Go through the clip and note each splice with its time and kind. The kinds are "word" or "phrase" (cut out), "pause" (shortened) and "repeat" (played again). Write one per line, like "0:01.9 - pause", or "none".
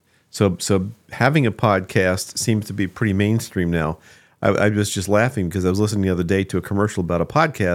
none